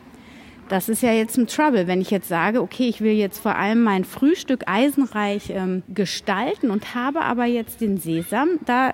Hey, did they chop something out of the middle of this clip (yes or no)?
yes